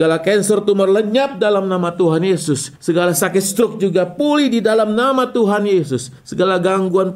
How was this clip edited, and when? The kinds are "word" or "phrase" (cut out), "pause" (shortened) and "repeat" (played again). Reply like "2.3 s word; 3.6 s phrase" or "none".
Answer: 2.8 s pause; 6.2 s pause